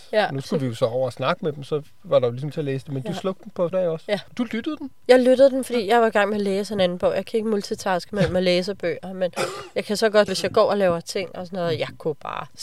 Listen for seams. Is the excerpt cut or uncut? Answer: cut